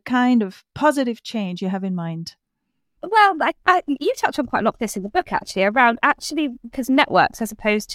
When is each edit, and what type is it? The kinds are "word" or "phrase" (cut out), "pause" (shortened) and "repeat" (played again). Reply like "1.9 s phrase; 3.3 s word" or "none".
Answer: 6.7 s phrase

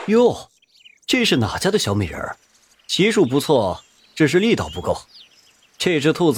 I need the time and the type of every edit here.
none

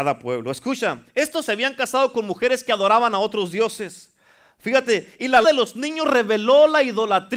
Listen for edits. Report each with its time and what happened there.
1.5 s word; 5.4 s word

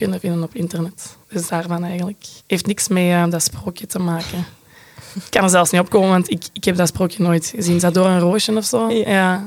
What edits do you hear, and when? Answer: 1.2 s pause; 2.4 s pause

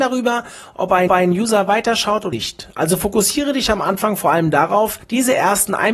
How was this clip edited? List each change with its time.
1.1 s repeat; 2.3 s word; 5.0 s pause

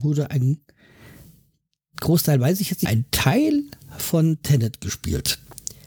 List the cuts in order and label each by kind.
2.9 s word

